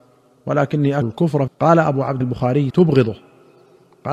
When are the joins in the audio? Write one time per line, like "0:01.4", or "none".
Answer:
0:01.0
0:01.5
0:02.2
0:02.7